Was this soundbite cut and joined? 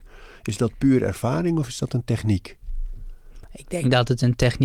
no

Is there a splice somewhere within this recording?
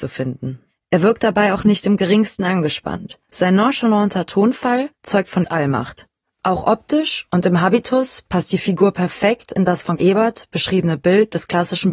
yes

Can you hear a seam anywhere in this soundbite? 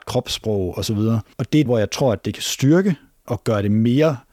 yes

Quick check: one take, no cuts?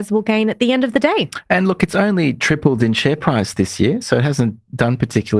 yes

